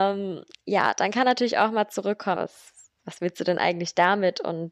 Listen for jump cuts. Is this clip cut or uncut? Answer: cut